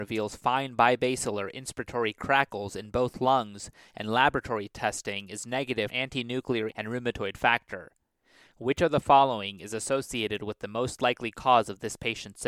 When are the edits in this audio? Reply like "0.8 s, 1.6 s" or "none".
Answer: 5.9 s, 6.7 s